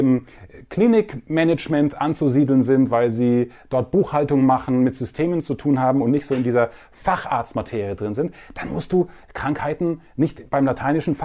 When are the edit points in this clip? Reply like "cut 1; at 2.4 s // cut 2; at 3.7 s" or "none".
none